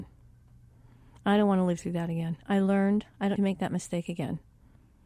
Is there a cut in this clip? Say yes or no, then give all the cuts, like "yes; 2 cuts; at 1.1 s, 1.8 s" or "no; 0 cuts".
yes; 1 cut; at 3.4 s